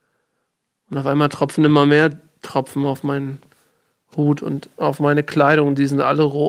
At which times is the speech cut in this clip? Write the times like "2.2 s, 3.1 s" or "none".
none